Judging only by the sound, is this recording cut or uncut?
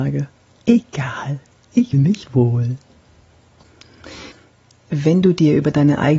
cut